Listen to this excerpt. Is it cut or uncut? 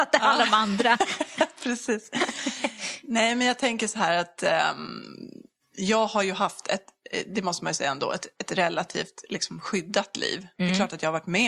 cut